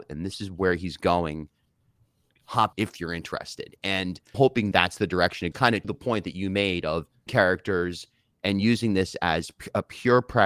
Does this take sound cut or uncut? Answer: cut